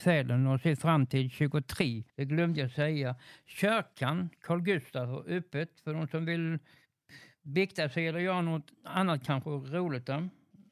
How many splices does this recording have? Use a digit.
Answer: 1